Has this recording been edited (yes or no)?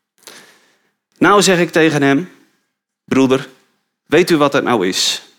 no